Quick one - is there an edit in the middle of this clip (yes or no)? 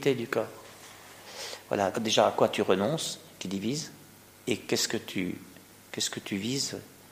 yes